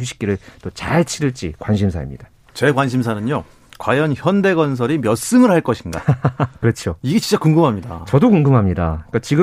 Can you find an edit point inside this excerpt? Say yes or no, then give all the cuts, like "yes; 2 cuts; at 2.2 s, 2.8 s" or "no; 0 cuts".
no; 0 cuts